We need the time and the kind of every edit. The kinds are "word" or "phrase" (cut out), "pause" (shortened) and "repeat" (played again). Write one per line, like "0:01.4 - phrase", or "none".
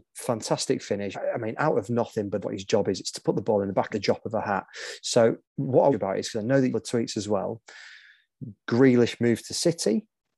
0:01.1 - word
0:02.4 - word
0:03.9 - phrase
0:05.4 - pause
0:05.9 - phrase
0:06.7 - phrase